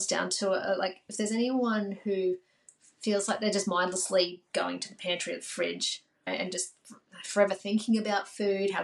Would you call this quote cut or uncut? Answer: uncut